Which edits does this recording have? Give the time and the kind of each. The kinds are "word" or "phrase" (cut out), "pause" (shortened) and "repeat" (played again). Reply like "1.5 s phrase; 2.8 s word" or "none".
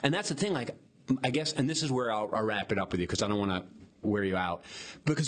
3.9 s pause